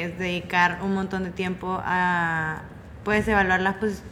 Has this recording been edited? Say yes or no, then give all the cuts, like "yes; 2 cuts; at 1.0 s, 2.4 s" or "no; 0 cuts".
no; 0 cuts